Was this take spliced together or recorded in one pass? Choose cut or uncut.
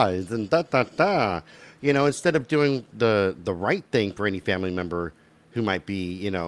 uncut